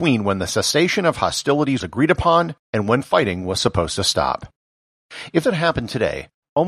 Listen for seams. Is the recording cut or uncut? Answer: cut